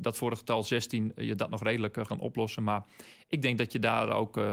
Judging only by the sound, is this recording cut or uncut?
cut